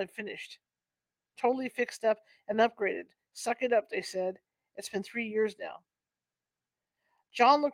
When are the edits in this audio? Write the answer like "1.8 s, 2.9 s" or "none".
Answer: none